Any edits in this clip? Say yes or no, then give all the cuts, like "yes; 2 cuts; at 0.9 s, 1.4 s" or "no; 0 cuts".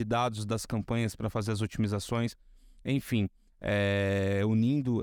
no; 0 cuts